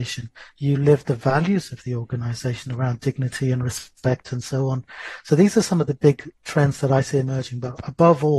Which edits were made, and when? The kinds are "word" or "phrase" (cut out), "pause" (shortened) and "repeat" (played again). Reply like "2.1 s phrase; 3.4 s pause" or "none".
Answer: none